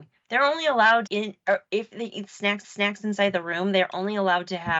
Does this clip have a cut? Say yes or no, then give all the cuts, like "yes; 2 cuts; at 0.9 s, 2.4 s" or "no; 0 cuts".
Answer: yes; 2 cuts; at 1.1 s, 2.6 s